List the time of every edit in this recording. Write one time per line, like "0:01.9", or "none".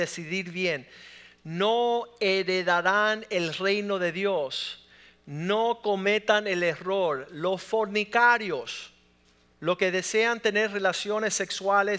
none

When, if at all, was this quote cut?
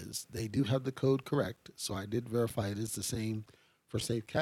none

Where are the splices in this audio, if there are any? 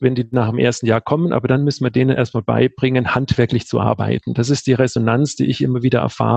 none

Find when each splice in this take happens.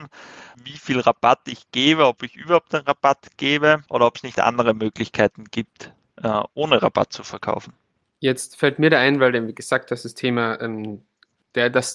0:03.9

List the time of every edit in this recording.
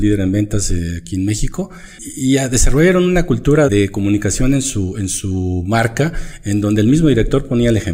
0:03.7

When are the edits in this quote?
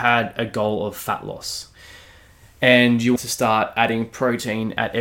0:03.2

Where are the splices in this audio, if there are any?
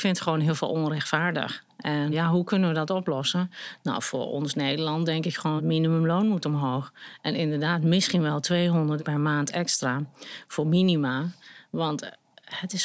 0:02.1
0:05.6
0:09.0

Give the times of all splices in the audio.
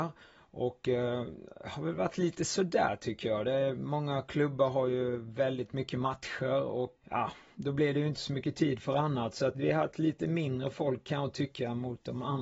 0:07.0
0:09.5

